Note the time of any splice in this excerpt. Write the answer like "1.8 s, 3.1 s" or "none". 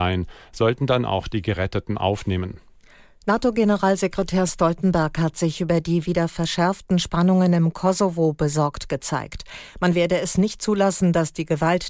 none

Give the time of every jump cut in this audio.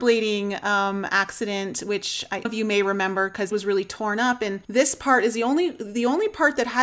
2.4 s, 3.5 s, 4.6 s

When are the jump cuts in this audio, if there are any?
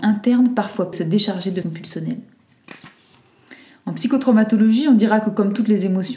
0.9 s, 1.6 s

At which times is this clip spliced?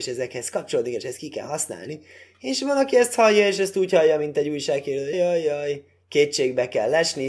5.1 s

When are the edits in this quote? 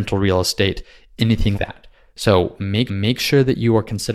1.5 s, 2.9 s

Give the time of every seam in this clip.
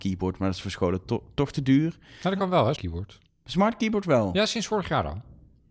2.8 s

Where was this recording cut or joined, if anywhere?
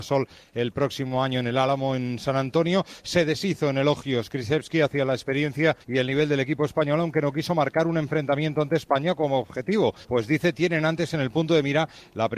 5.8 s, 10.0 s

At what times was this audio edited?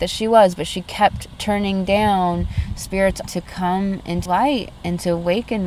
3.2 s, 4.3 s

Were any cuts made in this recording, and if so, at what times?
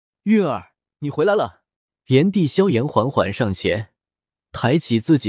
1.7 s

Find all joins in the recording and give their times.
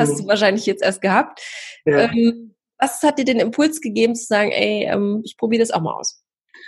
none

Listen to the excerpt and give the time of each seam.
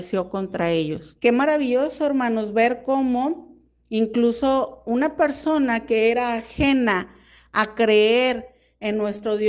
1.2 s

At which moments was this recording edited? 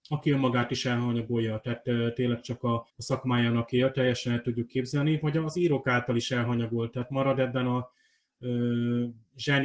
2.9 s

